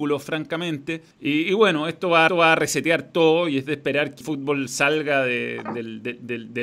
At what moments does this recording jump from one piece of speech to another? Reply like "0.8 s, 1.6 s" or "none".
1.1 s, 2.3 s, 4.2 s